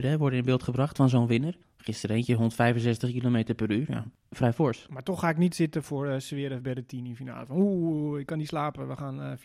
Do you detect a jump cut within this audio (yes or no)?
no